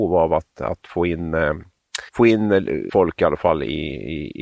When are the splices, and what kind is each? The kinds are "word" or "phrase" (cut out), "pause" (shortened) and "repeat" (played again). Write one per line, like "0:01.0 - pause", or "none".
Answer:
0:02.1 - pause
0:02.9 - word